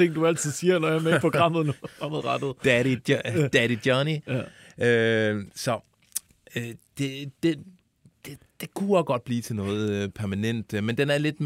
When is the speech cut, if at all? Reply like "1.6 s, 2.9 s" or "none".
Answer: none